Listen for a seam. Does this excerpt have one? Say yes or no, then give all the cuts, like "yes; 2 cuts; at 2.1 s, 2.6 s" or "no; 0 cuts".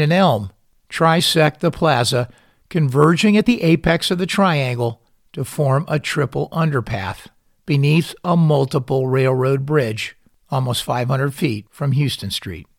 no; 0 cuts